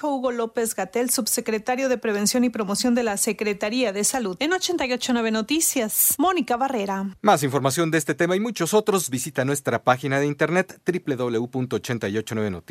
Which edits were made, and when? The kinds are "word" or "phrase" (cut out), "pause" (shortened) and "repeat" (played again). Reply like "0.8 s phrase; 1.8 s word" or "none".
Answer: none